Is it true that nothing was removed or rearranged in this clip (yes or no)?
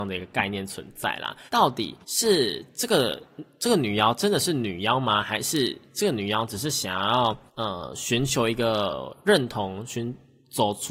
no